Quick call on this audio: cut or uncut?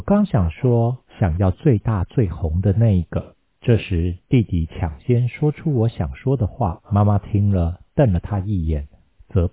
cut